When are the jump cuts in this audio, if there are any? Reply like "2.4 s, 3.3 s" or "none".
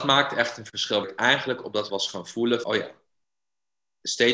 1.0 s, 1.9 s, 2.6 s